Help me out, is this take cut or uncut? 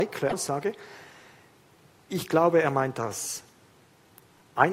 uncut